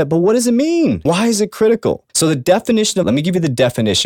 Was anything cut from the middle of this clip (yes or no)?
yes